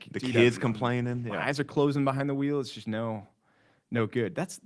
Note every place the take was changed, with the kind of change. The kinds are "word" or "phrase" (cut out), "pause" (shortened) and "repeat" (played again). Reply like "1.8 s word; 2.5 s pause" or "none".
none

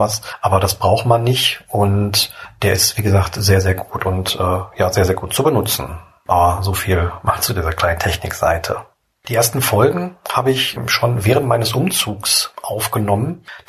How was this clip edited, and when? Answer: none

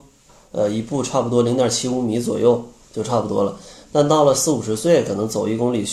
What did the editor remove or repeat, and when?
none

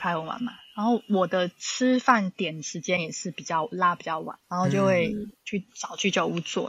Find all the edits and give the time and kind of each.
4.4 s pause

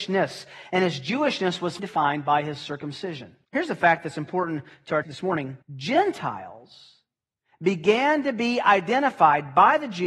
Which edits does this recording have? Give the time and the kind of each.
1.8 s word; 3.4 s pause; 5.0 s word; 5.6 s pause

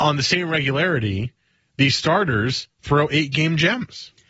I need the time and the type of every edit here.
none

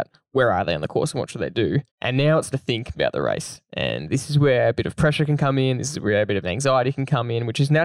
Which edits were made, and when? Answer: 1.9 s pause; 2.5 s word; 2.9 s word; 6.4 s word

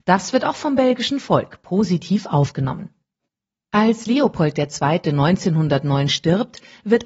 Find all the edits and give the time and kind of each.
none

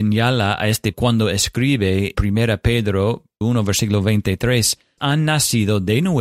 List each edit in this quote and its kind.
0.9 s word; 2.1 s word; 3.4 s word; 5.0 s word

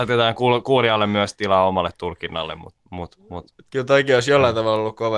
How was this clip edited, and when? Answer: 2.8 s pause

